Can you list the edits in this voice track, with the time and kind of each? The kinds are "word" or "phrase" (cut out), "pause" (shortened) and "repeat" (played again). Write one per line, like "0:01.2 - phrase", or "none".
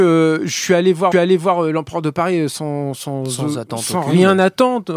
0:01.1 - repeat